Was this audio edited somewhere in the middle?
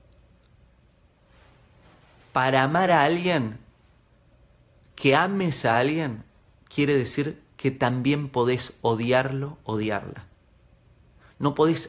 no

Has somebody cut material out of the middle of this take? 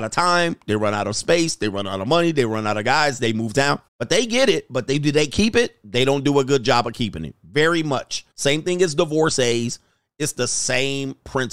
yes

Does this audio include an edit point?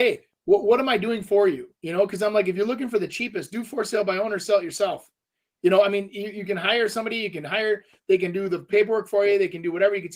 yes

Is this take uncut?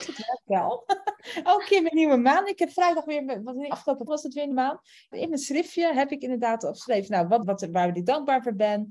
no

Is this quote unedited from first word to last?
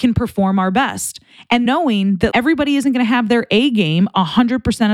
no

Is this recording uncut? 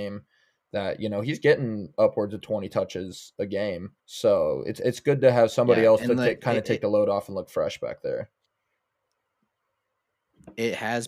no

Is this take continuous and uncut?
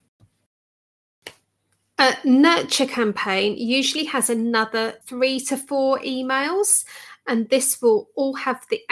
no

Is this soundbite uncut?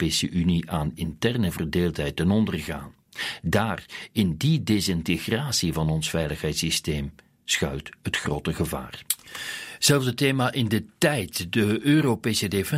yes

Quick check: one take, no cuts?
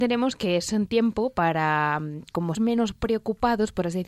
no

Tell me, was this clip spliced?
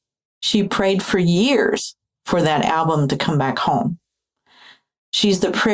no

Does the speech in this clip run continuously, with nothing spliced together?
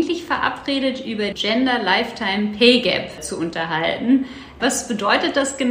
no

